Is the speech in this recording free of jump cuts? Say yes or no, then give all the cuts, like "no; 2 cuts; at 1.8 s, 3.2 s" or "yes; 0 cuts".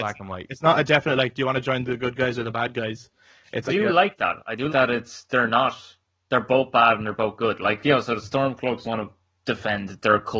no; 3 cuts; at 3.7 s, 4.7 s, 8.8 s